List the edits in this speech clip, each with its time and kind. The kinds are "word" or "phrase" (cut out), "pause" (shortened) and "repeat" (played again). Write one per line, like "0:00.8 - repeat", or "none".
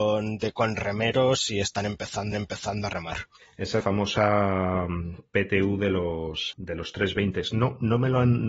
0:02.3 - repeat
0:03.8 - word
0:06.5 - word